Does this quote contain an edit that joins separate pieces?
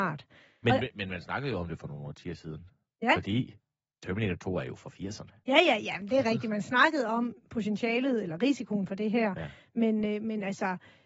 no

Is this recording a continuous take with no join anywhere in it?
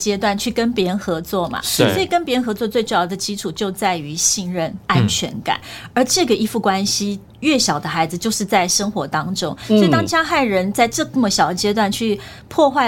yes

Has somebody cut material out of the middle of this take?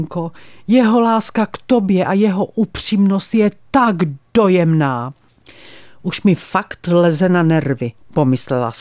no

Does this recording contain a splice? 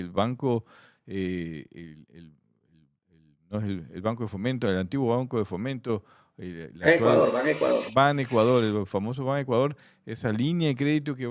no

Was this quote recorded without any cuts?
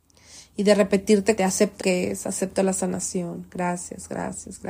no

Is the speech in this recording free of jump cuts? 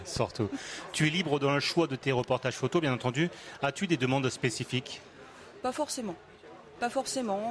yes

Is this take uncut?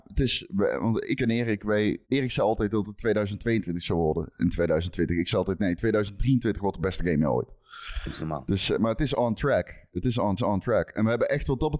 no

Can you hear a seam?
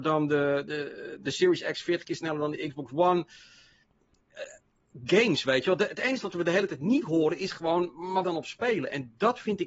yes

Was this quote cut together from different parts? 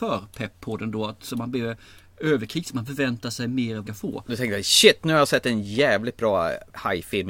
yes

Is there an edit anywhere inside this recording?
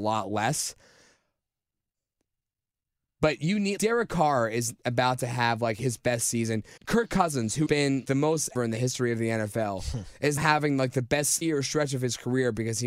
yes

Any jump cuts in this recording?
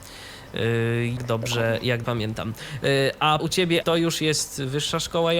yes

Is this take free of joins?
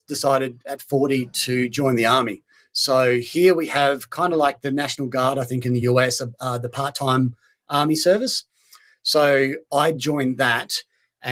yes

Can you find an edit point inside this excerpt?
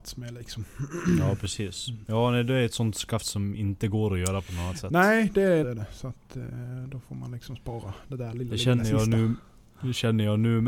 yes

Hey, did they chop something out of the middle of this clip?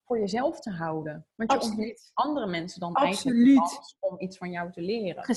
yes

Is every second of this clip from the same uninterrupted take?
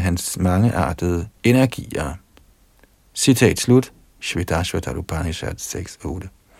yes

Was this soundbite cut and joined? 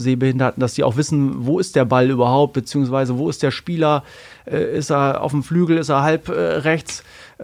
no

